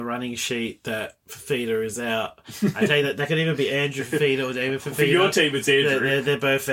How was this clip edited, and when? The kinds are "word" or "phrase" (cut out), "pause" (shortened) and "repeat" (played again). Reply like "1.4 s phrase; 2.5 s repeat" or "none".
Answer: 1.2 s pause

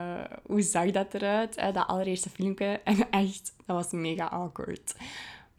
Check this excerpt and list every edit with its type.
none

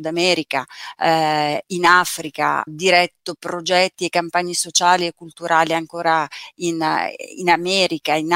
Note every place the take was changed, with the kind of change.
2.7 s word

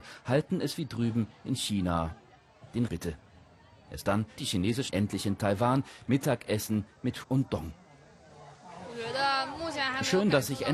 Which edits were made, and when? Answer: 2.9 s word; 4.4 s word; 4.9 s word; 7.2 s word

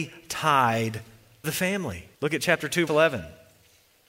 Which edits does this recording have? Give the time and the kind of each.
1.4 s word; 2.1 s pause; 2.9 s word

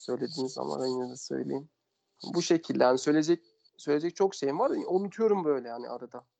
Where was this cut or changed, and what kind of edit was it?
none

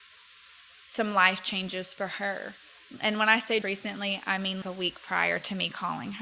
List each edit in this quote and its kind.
3.6 s word; 4.6 s word

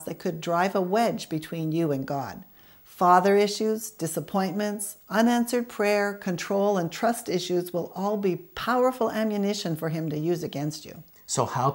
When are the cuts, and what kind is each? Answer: none

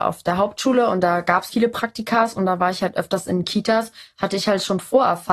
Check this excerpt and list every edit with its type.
1.5 s word

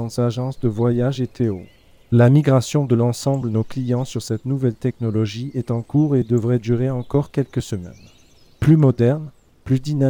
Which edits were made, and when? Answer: none

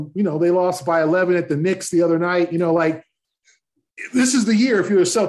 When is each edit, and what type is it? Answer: none

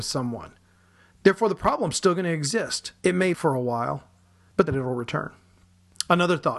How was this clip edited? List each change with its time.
3.0 s pause; 3.3 s phrase; 4.7 s phrase

